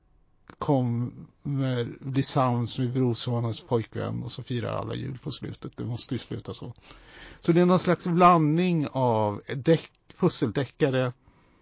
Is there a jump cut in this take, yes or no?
no